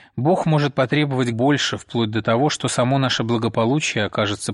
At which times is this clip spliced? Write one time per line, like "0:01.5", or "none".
0:01.3